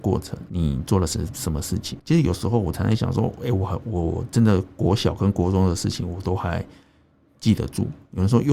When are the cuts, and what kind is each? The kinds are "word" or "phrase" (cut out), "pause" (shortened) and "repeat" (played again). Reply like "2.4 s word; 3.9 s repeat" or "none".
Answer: none